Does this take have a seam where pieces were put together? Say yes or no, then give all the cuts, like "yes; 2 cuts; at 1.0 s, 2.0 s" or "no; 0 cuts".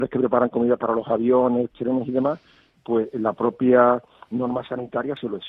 no; 0 cuts